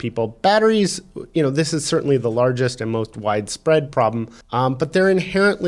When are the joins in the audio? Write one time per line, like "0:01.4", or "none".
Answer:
0:04.4